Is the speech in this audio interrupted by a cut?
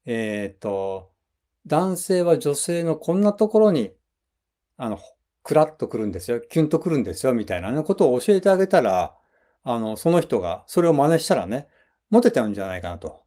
no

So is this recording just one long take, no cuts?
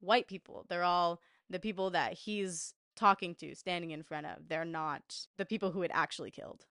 yes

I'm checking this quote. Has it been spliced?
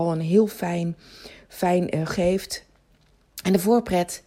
yes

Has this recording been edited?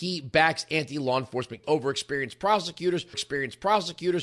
yes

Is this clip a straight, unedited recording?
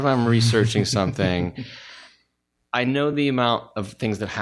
yes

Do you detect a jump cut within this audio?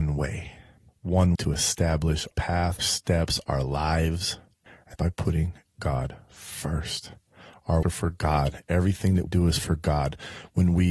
yes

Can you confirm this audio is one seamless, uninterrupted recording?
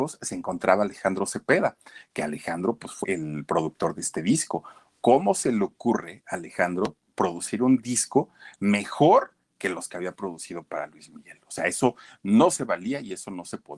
no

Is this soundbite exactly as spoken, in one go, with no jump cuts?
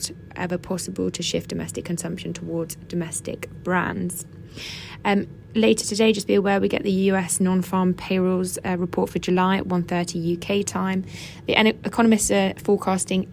yes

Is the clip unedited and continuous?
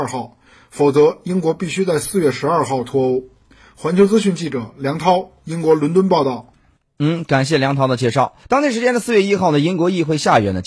no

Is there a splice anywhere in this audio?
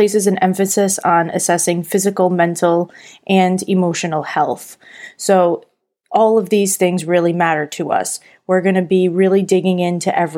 no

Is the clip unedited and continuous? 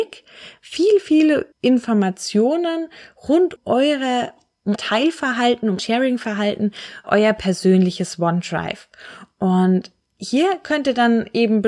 no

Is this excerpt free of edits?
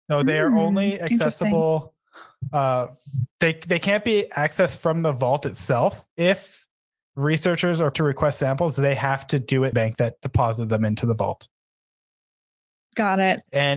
no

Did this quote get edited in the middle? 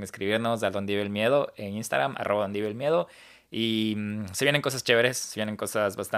no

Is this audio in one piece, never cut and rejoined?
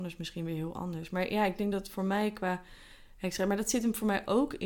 yes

